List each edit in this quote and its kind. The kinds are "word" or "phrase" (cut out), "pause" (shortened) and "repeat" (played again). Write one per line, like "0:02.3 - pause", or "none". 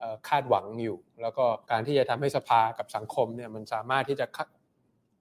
0:01.6 - pause

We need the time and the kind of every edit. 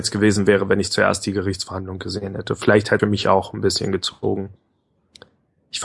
0:03.0 - phrase

